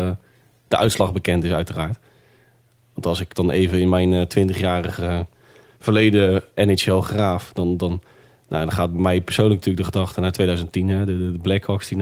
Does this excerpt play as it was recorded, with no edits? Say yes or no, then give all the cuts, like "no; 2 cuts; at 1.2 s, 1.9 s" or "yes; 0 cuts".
yes; 0 cuts